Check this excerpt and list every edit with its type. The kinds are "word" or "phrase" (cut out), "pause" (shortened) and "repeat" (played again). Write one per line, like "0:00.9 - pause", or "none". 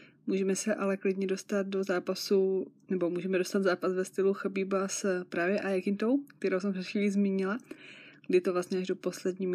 none